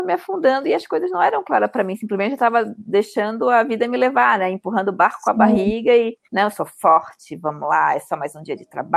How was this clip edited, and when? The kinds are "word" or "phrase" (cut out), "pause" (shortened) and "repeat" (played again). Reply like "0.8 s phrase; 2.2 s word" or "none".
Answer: 6.2 s pause